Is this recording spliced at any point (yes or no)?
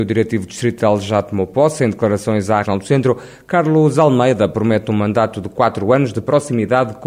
yes